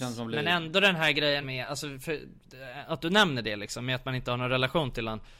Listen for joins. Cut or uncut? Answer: cut